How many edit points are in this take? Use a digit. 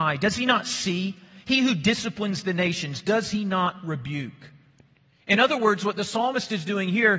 0